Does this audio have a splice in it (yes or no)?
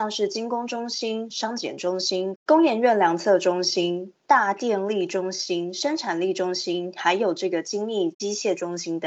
no